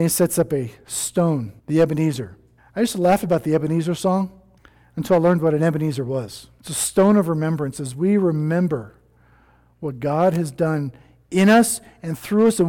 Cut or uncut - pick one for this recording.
cut